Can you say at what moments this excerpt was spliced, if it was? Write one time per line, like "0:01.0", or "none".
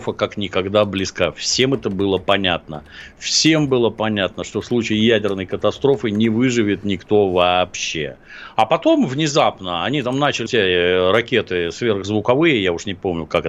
0:10.5